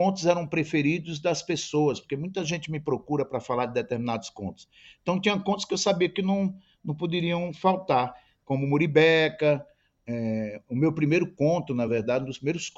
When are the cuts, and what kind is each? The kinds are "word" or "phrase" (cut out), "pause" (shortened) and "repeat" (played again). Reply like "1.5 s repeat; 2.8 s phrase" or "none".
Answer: none